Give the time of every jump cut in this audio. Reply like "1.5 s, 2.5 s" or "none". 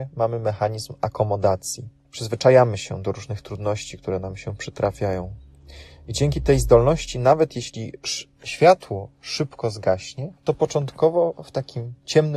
2.1 s, 10.4 s